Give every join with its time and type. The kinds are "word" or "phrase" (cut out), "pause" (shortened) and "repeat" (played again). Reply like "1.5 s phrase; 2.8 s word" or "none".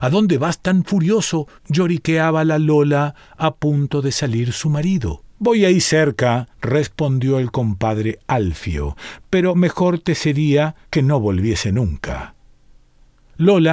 1.6 s pause; 5.3 s pause; 6.5 s pause; 10.8 s pause